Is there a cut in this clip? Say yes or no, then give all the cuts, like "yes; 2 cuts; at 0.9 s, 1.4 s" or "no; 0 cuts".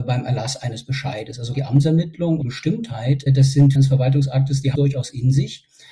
yes; 5 cuts; at 1.5 s, 2.4 s, 3.3 s, 3.7 s, 4.7 s